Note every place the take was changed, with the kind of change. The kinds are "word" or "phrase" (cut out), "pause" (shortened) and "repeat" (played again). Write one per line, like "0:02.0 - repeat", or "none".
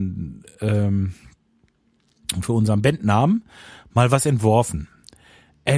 none